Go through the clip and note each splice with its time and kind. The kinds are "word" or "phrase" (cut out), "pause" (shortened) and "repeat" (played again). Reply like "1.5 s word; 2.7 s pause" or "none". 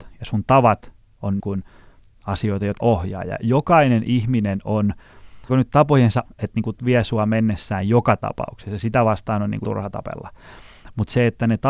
1.4 s word; 2.8 s word; 3.4 s word; 5.5 s word; 6.3 s word; 6.8 s word; 9.6 s word